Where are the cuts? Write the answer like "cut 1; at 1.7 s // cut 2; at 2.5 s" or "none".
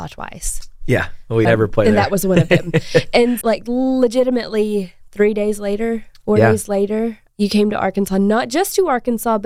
cut 1; at 1.4 s // cut 2; at 3.4 s